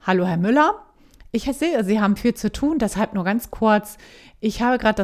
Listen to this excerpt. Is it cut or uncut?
uncut